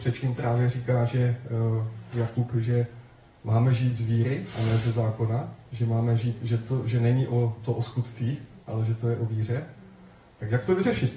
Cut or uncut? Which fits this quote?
uncut